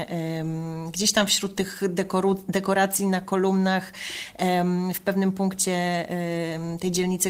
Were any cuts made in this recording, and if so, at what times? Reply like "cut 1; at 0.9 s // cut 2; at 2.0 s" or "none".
none

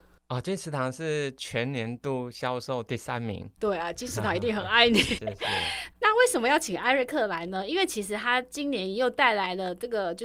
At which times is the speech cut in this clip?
cut 1; at 5.2 s // cut 2; at 5.9 s

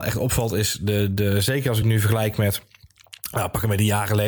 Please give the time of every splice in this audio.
none

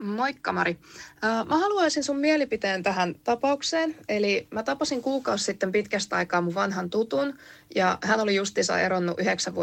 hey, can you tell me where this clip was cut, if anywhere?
none

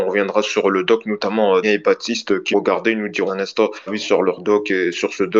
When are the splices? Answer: cut 1; at 1.6 s // cut 2; at 2.5 s // cut 3; at 3.3 s // cut 4; at 3.9 s

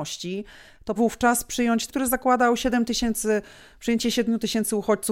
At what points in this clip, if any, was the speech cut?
cut 1; at 1.0 s // cut 2; at 1.9 s

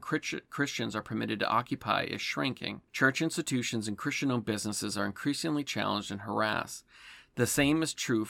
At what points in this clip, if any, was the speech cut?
cut 1; at 2.9 s

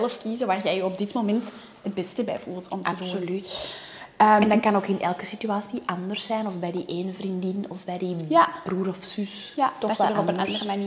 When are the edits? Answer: none

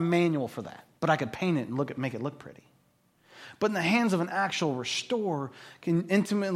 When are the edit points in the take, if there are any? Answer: cut 1; at 1.0 s

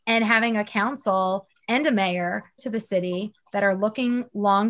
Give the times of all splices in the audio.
cut 1; at 2.6 s

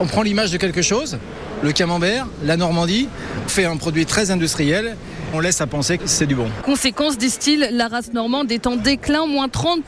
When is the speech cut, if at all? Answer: cut 1; at 3.5 s // cut 2; at 5.3 s // cut 3; at 6.0 s

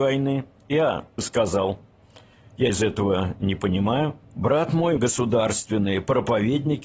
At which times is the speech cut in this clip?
cut 1; at 1.2 s // cut 2; at 2.7 s // cut 3; at 4.2 s // cut 4; at 5.0 s

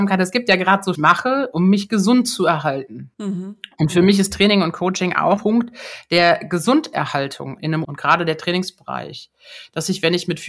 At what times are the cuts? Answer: cut 1; at 1.0 s // cut 2; at 3.1 s // cut 3; at 5.4 s // cut 4; at 7.8 s

